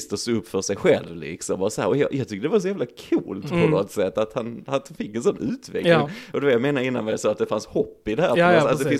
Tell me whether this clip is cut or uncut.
uncut